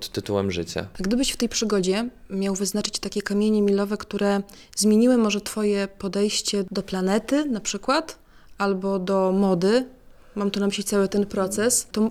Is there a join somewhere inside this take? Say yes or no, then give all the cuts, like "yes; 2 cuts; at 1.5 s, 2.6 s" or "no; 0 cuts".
no; 0 cuts